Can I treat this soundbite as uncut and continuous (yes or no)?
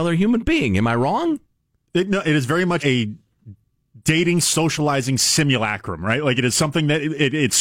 no